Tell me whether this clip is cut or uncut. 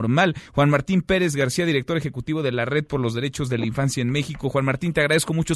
uncut